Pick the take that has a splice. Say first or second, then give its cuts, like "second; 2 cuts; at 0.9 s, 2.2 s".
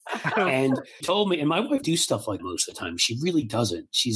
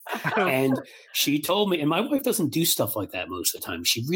first; 3 cuts; at 1.0 s, 1.8 s, 2.4 s